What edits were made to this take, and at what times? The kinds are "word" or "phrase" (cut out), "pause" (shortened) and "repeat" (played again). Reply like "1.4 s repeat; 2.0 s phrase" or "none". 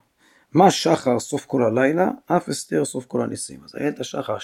none